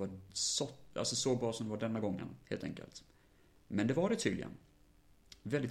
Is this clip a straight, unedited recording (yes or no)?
yes